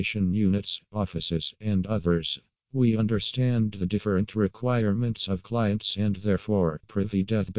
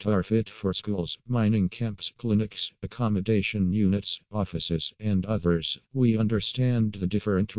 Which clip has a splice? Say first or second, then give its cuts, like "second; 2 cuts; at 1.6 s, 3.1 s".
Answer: second; 1 cut; at 5.8 s